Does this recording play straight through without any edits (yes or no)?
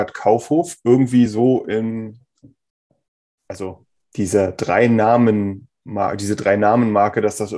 yes